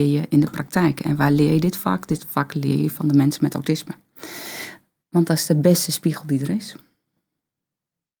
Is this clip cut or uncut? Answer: cut